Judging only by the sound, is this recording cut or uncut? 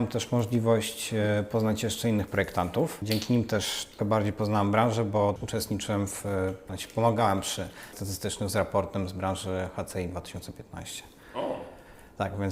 cut